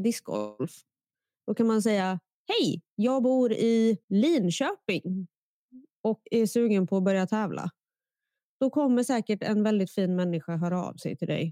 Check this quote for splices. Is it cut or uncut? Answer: cut